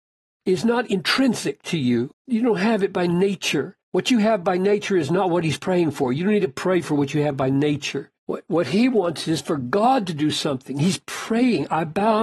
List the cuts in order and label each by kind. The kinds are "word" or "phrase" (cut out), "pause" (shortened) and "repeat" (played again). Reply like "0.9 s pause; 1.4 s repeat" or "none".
2.2 s pause; 3.8 s pause; 8.2 s pause